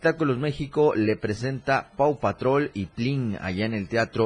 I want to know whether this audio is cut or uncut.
cut